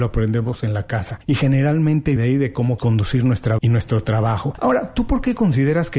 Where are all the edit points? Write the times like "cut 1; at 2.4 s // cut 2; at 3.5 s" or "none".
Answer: cut 1; at 2.2 s // cut 2; at 2.8 s // cut 3; at 3.6 s